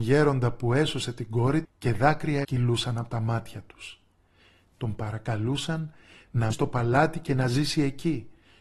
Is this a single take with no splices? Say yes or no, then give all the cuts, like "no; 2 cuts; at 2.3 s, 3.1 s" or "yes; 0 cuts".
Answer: no; 3 cuts; at 1.6 s, 2.4 s, 6.5 s